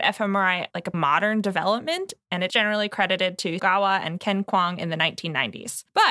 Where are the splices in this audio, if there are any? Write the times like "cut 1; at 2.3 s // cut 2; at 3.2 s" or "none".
cut 1; at 0.9 s // cut 2; at 2.5 s // cut 3; at 3.6 s